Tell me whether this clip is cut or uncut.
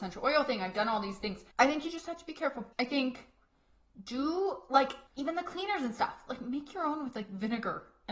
cut